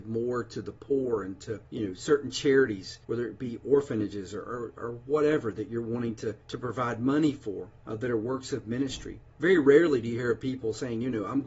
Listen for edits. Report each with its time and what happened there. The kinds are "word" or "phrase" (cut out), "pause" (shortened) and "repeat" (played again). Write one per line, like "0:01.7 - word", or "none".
0:01.7 - pause
0:03.0 - pause
0:06.4 - pause
0:07.8 - pause
0:09.3 - pause